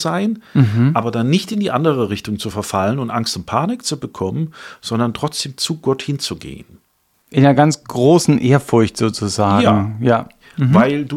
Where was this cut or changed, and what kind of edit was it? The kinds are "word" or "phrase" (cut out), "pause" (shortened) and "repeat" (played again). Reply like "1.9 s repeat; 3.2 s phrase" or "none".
none